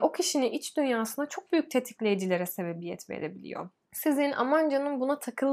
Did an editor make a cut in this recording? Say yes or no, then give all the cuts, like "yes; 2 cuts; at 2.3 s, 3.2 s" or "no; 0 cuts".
no; 0 cuts